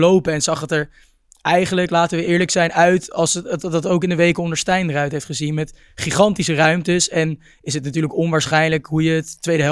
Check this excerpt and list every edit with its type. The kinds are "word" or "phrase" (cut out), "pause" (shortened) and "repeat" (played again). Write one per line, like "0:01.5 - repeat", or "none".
none